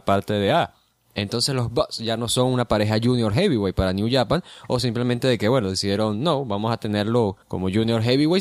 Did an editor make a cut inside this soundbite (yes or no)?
yes